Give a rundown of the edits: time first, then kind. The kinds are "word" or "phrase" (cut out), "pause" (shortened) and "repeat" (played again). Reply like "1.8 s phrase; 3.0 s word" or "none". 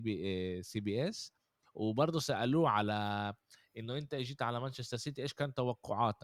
none